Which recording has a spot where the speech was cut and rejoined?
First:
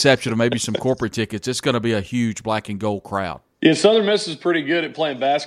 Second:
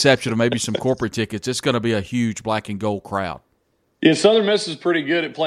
first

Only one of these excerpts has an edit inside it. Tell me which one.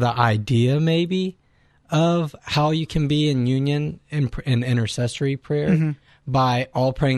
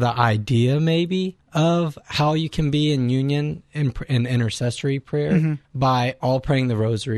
second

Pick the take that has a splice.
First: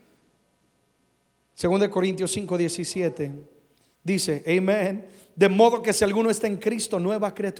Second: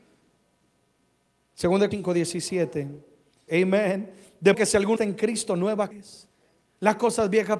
second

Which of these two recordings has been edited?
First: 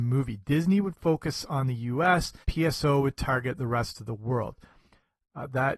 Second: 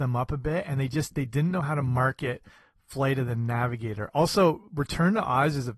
first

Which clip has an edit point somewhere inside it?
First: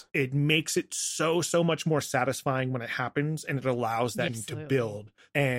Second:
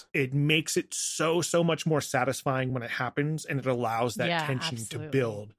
first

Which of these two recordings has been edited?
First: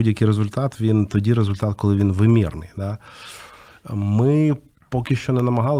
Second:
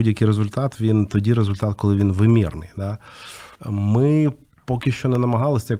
second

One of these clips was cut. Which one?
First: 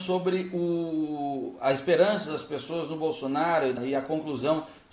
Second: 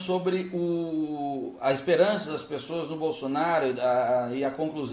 first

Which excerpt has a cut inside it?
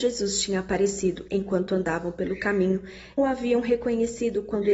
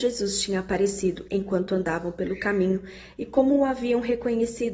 first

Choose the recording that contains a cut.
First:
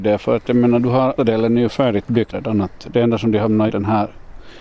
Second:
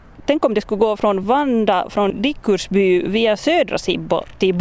first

